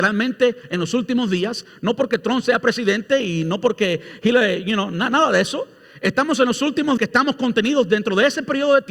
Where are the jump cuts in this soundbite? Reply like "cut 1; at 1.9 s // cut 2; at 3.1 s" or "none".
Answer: cut 1; at 7.0 s